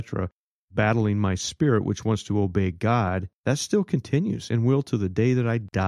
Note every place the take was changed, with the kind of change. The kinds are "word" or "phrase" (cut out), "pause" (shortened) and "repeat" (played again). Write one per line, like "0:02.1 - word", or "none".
0:03.4 - pause